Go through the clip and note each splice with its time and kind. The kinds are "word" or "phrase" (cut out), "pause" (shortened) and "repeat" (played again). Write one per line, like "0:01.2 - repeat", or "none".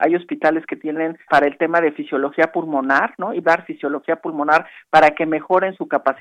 0:01.3 - word
0:03.4 - word

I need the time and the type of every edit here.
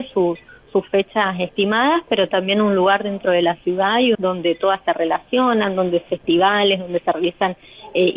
0:02.3 - word
0:04.1 - phrase
0:06.1 - word

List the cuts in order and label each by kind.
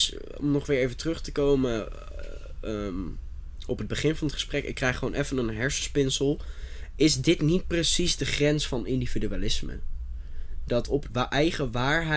0:11.1 - phrase

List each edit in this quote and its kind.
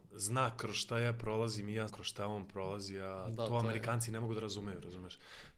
0:01.9 - word

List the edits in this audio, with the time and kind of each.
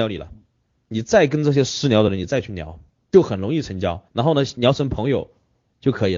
0:02.9 - pause
0:04.1 - pause

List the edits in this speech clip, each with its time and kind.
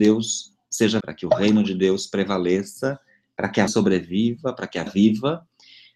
0:01.0 - word
0:03.7 - word
0:04.9 - word

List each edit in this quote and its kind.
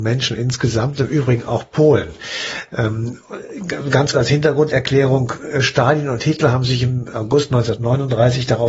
0:04.1 - word

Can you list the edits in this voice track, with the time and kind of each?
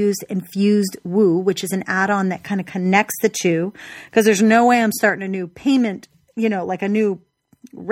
none

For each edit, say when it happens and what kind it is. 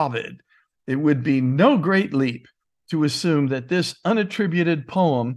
none

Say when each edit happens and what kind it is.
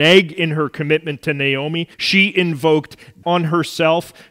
0:01.9 - pause
0:03.2 - word

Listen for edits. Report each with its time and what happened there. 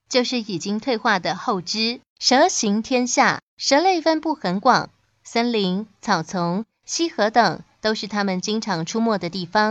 0:02.1 - pause
0:03.5 - pause

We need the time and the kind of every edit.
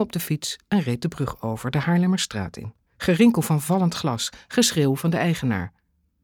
0:02.9 - pause

